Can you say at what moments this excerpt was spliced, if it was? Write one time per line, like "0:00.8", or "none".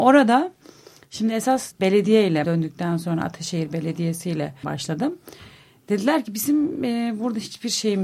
0:01.7
0:02.4
0:04.6

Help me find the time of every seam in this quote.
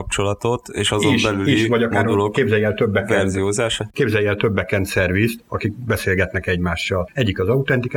none

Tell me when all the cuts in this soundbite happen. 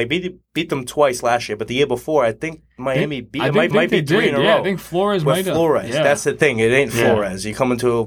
0:03.7

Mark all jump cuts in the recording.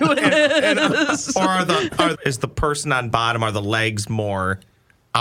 0:02.1

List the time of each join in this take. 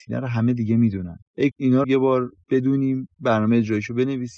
0:01.5
0:01.8

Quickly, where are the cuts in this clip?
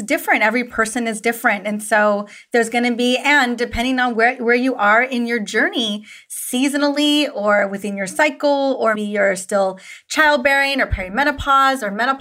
0:08.9

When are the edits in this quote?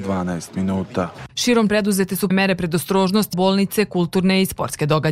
0:01.7
0:02.3
0:03.3

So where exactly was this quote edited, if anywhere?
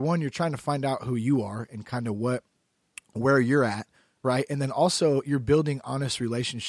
none

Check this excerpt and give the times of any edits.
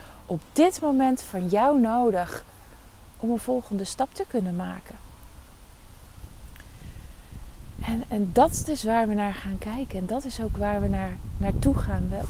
0:08.1
0:08.6

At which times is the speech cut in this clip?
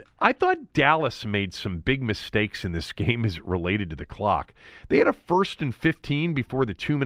none

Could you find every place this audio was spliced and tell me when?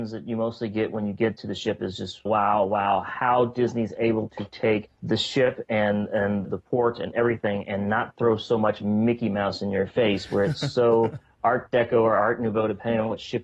0:02.3
0:05.0
0:06.4

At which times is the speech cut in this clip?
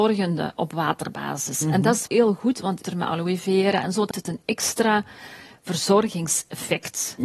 0:02.1
0:02.8
0:04.1

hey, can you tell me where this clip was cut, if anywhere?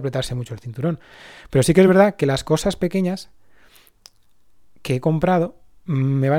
none

